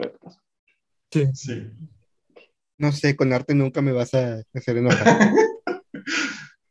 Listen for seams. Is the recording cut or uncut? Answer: uncut